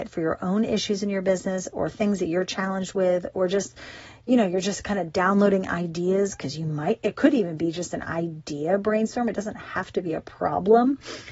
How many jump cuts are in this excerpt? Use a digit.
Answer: 0